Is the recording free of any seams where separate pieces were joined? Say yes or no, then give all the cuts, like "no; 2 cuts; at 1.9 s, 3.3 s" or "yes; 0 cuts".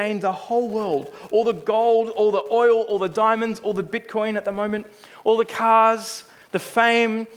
yes; 0 cuts